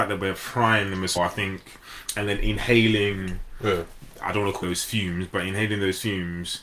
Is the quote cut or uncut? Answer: cut